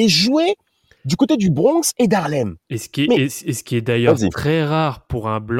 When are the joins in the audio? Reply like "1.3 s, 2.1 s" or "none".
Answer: none